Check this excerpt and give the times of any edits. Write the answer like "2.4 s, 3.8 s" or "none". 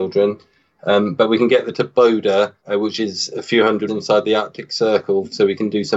1.7 s, 2.6 s, 3.9 s

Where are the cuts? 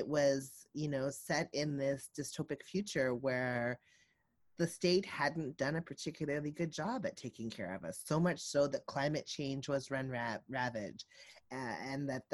none

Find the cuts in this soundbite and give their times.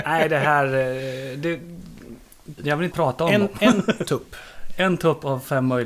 2.6 s, 2.9 s, 4.1 s

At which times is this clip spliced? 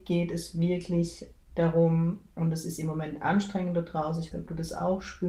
4.3 s

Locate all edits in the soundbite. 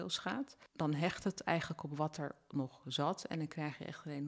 none

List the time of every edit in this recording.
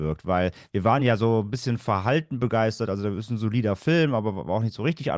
none

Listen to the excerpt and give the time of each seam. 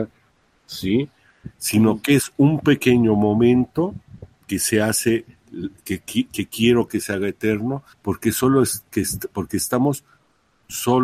7.9 s

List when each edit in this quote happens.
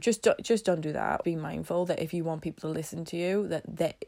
1.2 s

